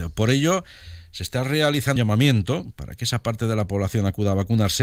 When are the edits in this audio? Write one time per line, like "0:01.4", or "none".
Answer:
0:02.0